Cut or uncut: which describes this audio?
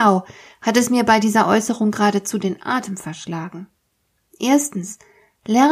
uncut